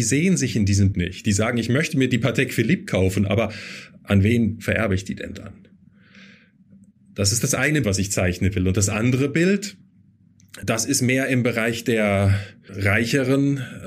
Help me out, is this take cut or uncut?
cut